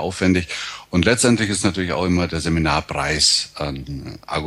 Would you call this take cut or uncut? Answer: uncut